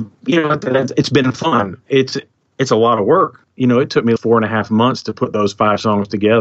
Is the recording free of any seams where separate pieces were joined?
no; 1 cut; at 4.2 s

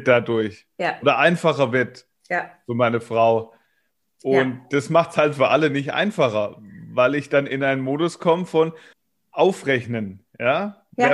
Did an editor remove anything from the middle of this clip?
yes; 3 cuts; at 2.2 s, 4.0 s, 8.9 s

